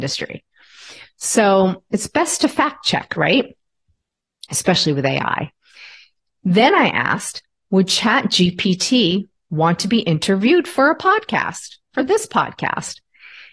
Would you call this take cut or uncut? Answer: uncut